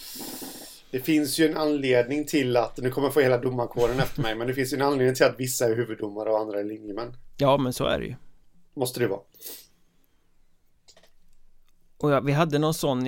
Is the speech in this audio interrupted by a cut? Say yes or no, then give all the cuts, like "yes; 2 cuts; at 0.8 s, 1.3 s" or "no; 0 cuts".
no; 0 cuts